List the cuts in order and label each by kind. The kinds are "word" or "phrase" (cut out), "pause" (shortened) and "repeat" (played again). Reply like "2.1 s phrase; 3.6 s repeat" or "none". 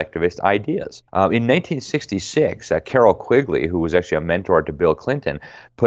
1.1 s pause